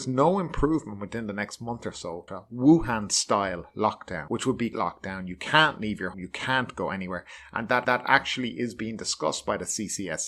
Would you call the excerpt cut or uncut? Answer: cut